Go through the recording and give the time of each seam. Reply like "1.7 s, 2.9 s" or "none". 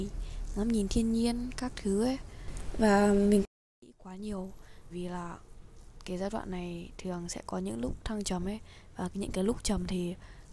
4.9 s